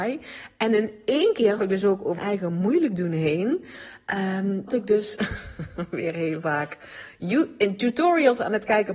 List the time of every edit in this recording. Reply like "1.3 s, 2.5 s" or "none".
1.6 s, 2.2 s, 4.7 s